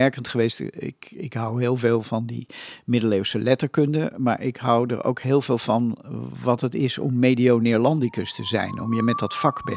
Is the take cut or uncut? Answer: uncut